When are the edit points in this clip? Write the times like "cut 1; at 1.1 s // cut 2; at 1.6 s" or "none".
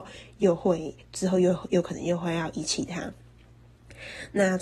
cut 1; at 1.0 s